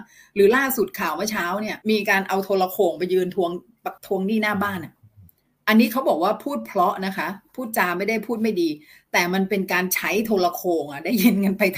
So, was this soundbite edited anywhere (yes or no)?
yes